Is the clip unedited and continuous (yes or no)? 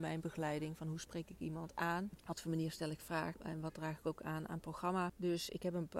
yes